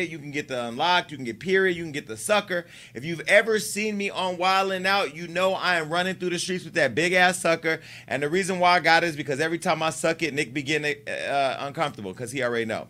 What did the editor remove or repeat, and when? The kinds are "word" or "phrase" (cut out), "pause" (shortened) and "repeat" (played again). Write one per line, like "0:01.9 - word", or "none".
none